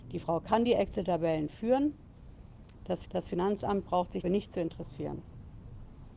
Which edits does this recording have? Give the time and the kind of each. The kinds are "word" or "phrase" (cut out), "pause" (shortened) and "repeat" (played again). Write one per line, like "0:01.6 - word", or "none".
0:03.0 - repeat
0:04.2 - word